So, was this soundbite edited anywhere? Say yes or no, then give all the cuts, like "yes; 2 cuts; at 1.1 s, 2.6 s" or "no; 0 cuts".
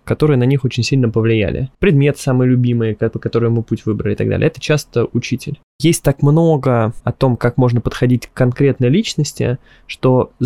yes; 1 cut; at 7.0 s